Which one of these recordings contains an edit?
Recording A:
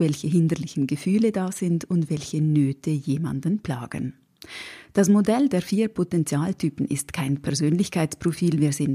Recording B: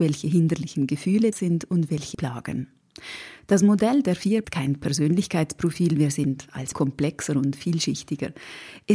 B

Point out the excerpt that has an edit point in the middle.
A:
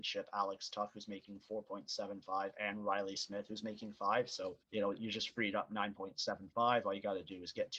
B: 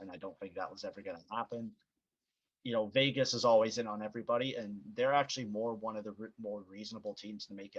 A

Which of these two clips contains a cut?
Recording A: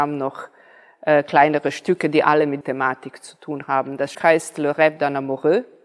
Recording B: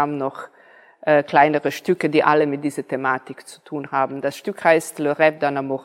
A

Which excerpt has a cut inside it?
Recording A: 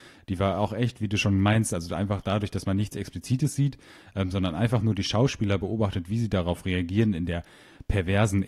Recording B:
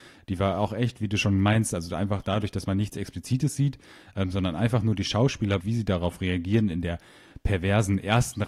B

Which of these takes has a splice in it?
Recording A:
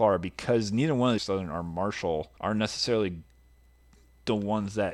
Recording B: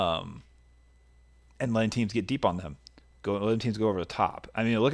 A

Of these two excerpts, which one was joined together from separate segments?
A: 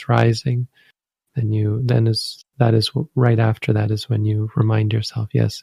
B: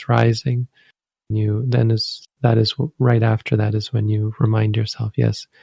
B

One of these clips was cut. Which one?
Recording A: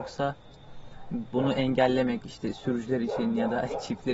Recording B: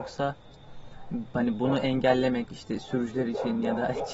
A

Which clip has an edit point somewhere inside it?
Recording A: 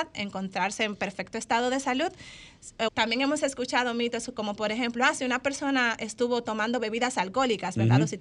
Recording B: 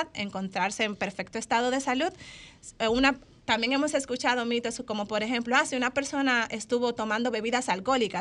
A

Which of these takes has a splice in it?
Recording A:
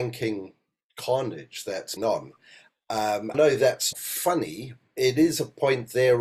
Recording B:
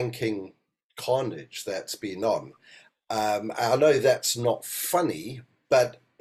A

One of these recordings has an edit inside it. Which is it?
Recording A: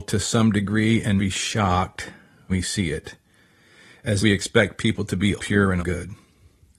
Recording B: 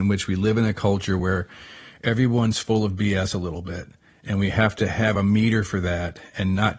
A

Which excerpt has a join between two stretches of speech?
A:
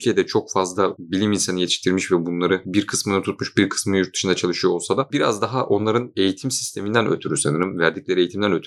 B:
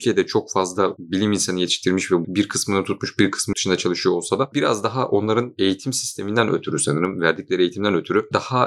B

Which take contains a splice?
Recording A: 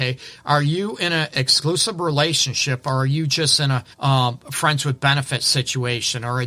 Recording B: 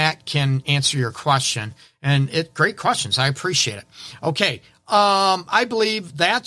A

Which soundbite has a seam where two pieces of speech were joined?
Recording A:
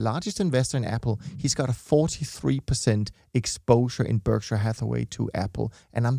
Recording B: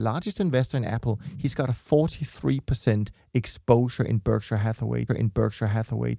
B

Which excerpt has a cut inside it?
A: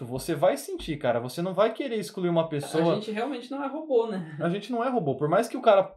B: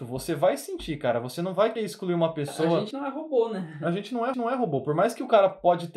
B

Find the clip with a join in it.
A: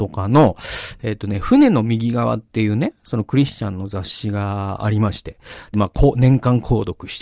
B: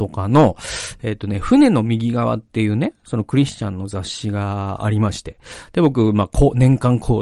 A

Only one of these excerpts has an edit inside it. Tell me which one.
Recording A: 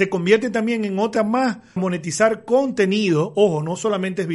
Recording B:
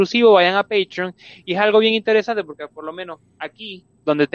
A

